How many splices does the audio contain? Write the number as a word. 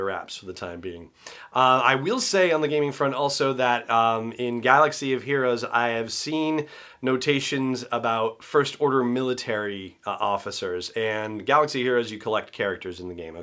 zero